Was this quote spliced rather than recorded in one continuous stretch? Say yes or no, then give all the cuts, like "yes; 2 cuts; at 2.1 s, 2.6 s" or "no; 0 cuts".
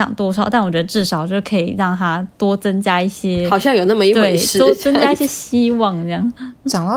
yes; 1 cut; at 2.3 s